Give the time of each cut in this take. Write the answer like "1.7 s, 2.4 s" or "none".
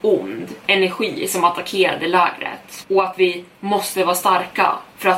none